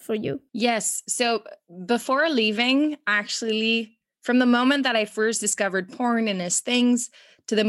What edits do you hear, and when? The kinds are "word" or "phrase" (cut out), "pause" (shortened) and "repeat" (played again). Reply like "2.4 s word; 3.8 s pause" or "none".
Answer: none